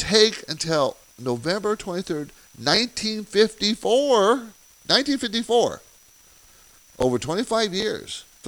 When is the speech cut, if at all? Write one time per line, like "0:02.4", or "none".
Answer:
none